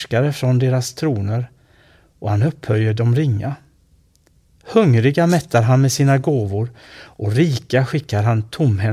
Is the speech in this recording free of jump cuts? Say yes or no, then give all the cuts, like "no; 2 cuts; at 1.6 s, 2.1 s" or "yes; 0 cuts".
yes; 0 cuts